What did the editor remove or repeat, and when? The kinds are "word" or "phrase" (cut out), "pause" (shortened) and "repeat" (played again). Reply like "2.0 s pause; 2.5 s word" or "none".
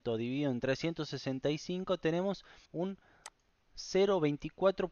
2.7 s pause